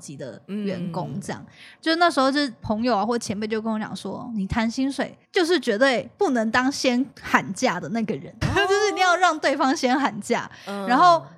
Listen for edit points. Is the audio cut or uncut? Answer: cut